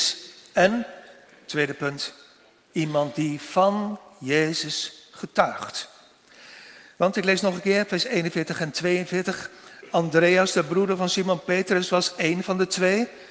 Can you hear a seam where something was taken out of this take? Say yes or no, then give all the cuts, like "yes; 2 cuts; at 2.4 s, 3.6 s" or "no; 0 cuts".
no; 0 cuts